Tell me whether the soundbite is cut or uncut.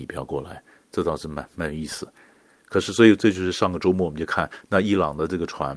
uncut